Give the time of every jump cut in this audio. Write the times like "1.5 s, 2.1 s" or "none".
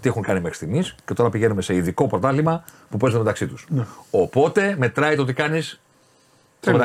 1.0 s